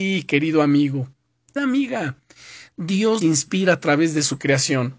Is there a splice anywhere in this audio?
yes; 2 cuts; at 1.6 s, 3.2 s

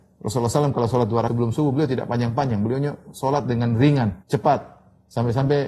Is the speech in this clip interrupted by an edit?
yes; 2 cuts; at 1.3 s, 4.2 s

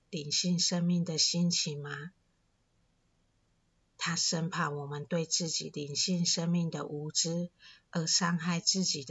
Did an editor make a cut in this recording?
no; 0 cuts

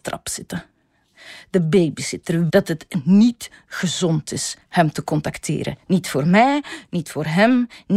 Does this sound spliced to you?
yes; 1 cut; at 2.5 s

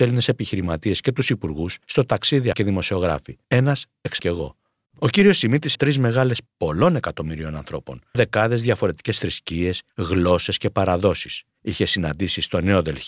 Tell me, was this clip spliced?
yes; 9 cuts; at 1.8 s, 2.5 s, 3.4 s, 4.2 s, 5.7 s, 6.5 s, 8.1 s, 9.9 s, 11.5 s

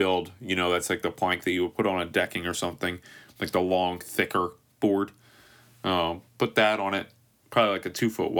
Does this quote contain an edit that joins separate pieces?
no; 0 cuts

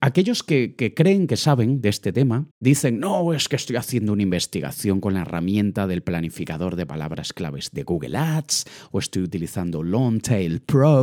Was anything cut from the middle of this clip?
yes; 1 cut; at 2.5 s

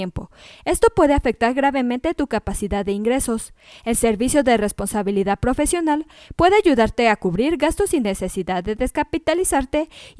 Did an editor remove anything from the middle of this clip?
no; 0 cuts

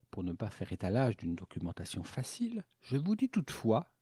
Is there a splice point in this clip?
no; 0 cuts

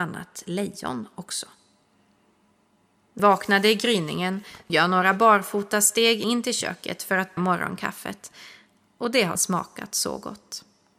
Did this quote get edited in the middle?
yes; 5 cuts; at 3.2 s, 4.7 s, 6.2 s, 7.4 s, 9.4 s

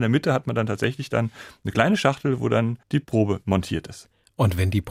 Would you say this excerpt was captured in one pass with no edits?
no; 1 cut; at 2.8 s

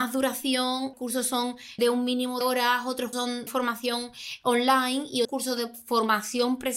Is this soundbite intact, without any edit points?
no; 6 cuts; at 0.9 s, 1.8 s, 2.4 s, 3.1 s, 3.5 s, 5.2 s

